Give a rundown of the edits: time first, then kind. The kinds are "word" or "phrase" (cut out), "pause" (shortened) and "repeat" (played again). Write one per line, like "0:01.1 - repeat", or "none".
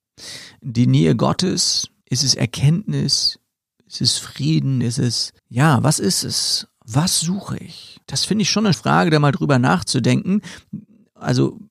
0:02.0 - pause
0:05.4 - pause
0:08.0 - pause
0:08.7 - word